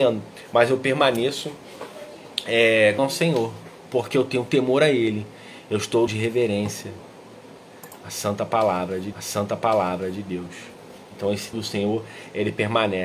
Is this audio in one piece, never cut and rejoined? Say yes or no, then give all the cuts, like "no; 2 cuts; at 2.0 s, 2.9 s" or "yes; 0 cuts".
no; 4 cuts; at 3.0 s, 6.1 s, 9.1 s, 11.5 s